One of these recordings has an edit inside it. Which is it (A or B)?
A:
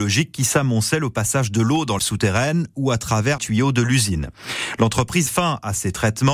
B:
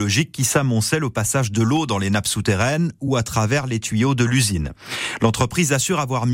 A